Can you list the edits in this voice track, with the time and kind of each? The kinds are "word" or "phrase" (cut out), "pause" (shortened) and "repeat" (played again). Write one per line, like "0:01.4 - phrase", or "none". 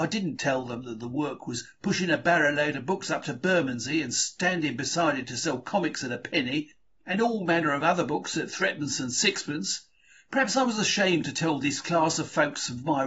none